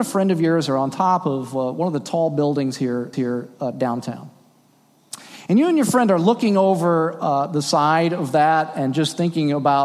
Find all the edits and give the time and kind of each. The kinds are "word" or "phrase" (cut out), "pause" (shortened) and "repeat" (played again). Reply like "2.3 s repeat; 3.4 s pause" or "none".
3.1 s repeat